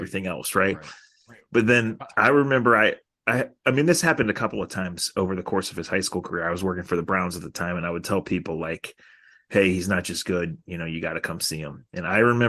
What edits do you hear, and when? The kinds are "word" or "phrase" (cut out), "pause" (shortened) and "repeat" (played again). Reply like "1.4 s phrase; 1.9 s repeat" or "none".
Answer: none